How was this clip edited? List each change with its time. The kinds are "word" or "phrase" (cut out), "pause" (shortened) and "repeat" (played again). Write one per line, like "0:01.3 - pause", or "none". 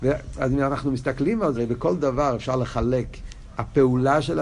0:01.5 - word